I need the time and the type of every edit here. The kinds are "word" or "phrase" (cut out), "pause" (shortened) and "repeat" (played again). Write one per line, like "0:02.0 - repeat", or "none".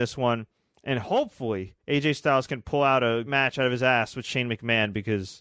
0:01.8 - pause
0:03.3 - word